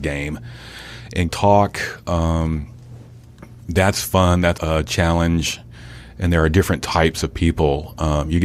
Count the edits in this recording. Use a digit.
2